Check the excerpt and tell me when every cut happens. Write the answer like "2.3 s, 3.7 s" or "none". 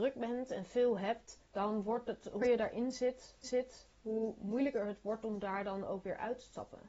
1.5 s, 2.4 s, 3.4 s